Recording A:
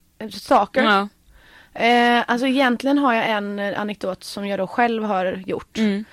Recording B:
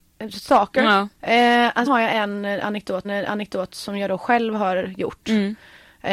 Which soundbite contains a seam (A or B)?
B